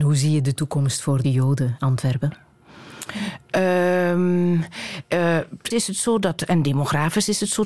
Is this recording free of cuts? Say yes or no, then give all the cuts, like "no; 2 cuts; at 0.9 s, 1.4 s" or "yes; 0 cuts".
no; 3 cuts; at 1.2 s, 1.8 s, 5.7 s